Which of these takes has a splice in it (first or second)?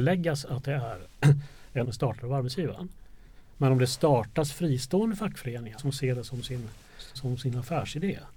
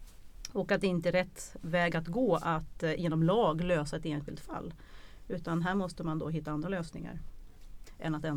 first